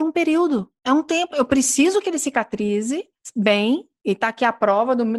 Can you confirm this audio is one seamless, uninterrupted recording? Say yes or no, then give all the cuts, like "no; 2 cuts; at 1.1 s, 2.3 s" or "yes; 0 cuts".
yes; 0 cuts